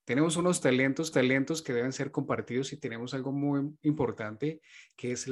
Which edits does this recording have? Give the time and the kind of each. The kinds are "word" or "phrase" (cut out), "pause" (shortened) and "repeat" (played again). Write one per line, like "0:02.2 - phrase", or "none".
0:01.1 - repeat